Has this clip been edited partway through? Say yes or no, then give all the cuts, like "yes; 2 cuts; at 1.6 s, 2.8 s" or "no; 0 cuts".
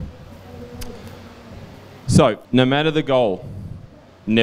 yes; 1 cut; at 2.4 s